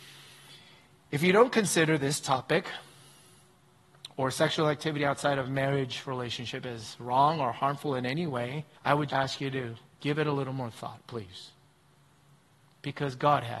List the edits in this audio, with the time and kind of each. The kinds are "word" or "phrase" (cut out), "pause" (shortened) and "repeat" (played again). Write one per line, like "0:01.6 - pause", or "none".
0:08.8 - pause
0:09.1 - word